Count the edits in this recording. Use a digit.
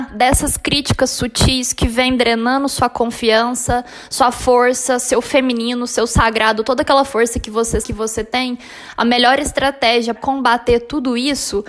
2